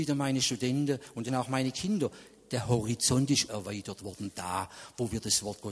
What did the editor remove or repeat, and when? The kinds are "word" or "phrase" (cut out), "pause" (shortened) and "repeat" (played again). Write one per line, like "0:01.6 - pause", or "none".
0:01.3 - word
0:03.5 - word